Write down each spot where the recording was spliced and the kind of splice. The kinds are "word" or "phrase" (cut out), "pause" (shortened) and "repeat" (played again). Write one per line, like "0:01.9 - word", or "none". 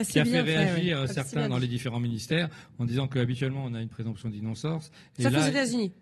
none